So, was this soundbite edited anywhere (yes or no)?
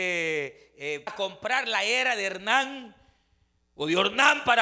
yes